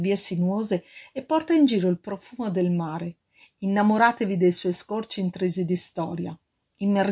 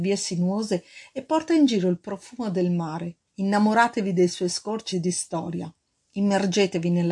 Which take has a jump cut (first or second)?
second